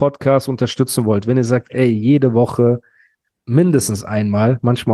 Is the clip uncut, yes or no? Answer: yes